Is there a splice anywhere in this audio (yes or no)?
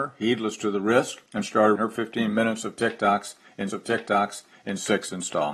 yes